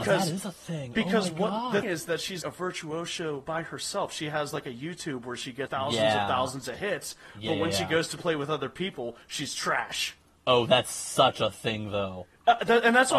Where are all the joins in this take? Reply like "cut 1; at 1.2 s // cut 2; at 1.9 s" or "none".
cut 1; at 1.8 s // cut 2; at 2.4 s // cut 3; at 5.7 s